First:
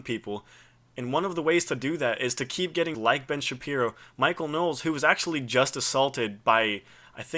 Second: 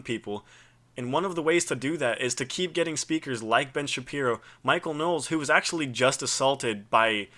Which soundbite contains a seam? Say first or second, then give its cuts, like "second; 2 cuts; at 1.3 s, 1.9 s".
first; 1 cut; at 2.9 s